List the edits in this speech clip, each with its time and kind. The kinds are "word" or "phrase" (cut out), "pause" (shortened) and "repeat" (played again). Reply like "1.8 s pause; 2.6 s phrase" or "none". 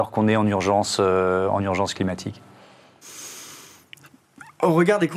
none